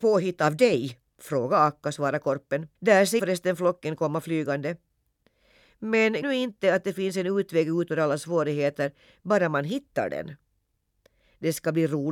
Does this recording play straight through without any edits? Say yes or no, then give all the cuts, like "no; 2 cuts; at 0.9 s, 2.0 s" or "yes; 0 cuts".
no; 4 cuts; at 1.1 s, 2.8 s, 3.2 s, 6.2 s